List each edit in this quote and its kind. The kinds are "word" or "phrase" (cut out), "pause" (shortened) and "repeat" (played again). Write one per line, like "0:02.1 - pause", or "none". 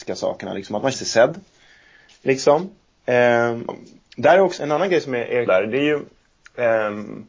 0:00.9 - word
0:03.7 - word
0:04.6 - word
0:05.5 - word